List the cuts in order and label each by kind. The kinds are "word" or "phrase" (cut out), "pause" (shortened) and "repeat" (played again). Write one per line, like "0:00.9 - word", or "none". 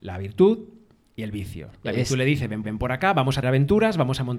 0:02.6 - repeat
0:03.4 - word